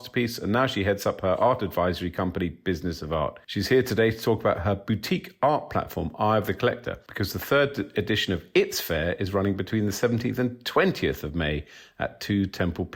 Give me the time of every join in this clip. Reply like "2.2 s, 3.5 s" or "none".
none